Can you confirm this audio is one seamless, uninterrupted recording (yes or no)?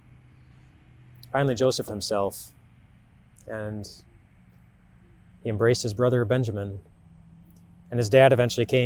no